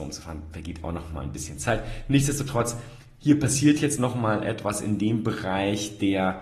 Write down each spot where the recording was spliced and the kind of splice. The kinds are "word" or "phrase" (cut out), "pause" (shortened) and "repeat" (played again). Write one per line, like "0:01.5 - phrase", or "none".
none

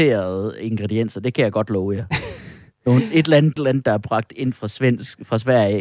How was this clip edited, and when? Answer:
0:03.6 - word

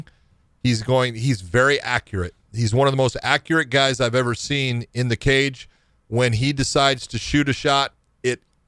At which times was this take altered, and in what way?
none

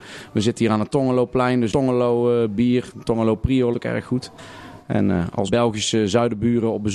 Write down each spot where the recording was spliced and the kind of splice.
0:01.7 - word
0:03.7 - word
0:05.5 - word

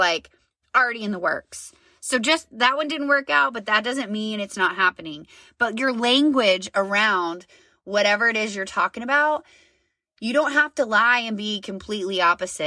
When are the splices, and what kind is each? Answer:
none

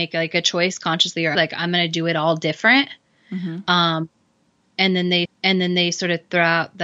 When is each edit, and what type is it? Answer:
0:01.4 - word
0:05.3 - repeat

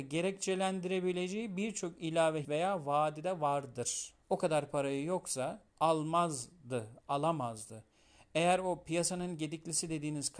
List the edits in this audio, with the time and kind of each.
0:02.4 - word
0:04.2 - pause
0:05.7 - pause

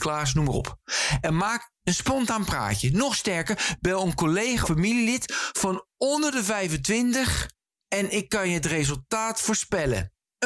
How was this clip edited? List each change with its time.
0:04.6 - word

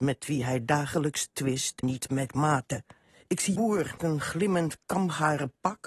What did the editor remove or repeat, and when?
0:01.8 - word
0:03.0 - pause
0:03.6 - word
0:04.0 - word

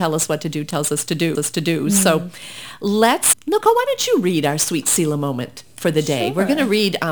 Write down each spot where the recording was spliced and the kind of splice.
0:01.3 - repeat
0:03.3 - word

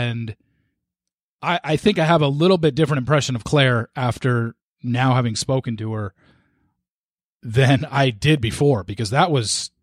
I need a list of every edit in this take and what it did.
none

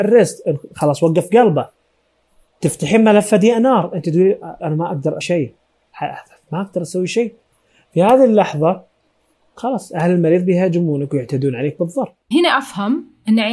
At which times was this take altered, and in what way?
0:04.6 - word
0:05.2 - word
0:12.3 - word

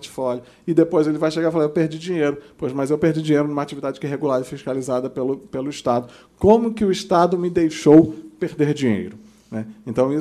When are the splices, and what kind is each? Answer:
none

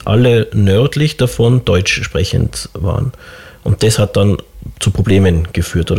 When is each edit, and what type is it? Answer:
none

